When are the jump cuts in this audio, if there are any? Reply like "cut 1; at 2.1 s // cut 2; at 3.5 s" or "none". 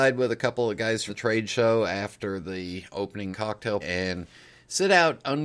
cut 1; at 1.1 s // cut 2; at 3.3 s // cut 3; at 3.8 s